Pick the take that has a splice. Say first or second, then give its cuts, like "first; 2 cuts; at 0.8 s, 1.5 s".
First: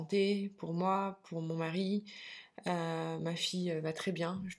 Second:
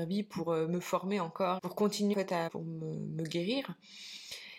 second; 3 cuts; at 1.6 s, 2.1 s, 2.5 s